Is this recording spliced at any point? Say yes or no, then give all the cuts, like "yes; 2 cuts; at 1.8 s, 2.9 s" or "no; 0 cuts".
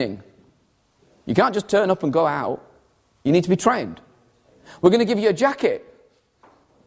no; 0 cuts